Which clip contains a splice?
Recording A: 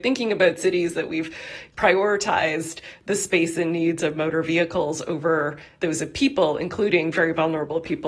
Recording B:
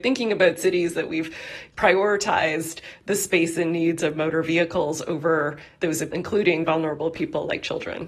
B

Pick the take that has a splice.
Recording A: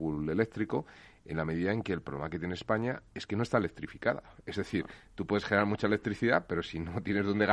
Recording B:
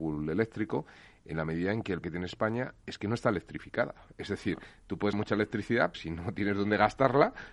B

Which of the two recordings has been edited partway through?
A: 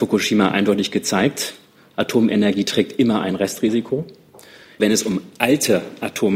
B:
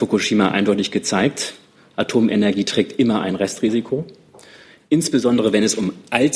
A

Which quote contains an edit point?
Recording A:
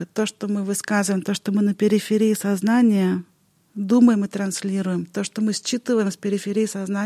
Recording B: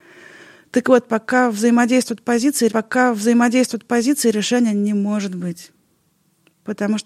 B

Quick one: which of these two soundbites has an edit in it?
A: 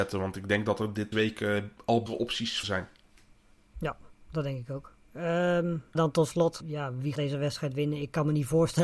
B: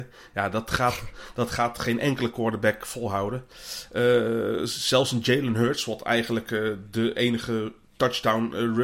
A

